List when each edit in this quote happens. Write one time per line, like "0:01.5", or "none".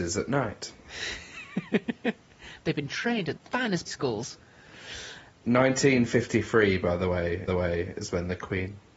0:03.4
0:03.9
0:07.5